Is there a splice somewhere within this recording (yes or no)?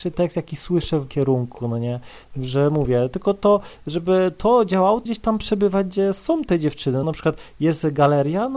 yes